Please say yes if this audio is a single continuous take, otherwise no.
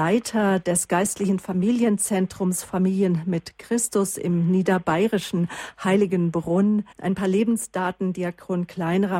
no